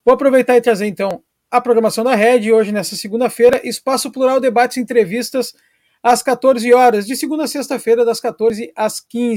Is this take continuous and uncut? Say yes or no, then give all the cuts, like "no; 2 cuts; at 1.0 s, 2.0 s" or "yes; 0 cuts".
yes; 0 cuts